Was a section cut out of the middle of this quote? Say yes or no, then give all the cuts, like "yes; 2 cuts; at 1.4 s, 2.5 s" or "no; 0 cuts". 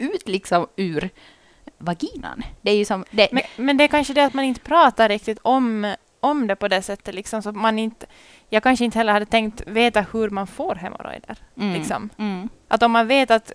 yes; 2 cuts; at 1.8 s, 3.4 s